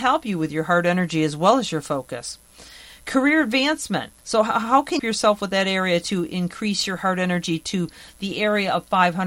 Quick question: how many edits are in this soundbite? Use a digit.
2